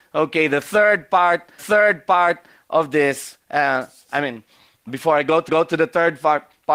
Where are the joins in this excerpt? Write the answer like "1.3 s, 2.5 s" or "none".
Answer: 1.6 s, 3.4 s, 4.9 s, 5.5 s